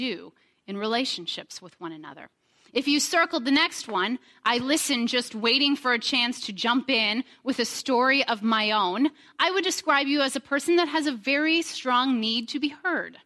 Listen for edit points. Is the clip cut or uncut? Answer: uncut